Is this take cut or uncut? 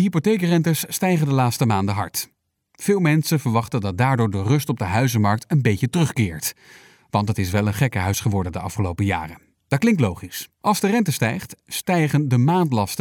cut